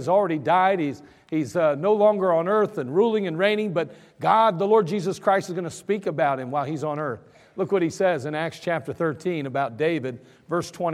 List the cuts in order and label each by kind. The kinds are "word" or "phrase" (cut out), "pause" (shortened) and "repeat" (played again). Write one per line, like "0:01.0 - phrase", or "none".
none